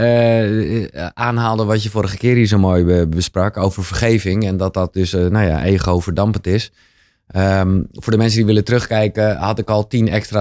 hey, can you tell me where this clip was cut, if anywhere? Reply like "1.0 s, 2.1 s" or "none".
none